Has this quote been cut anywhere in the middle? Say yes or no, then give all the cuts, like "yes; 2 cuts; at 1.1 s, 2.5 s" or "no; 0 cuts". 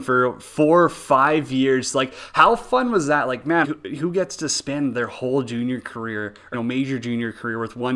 yes; 2 cuts; at 3.6 s, 6.5 s